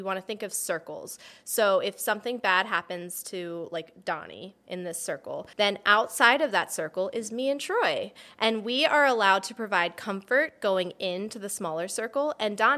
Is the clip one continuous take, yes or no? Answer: no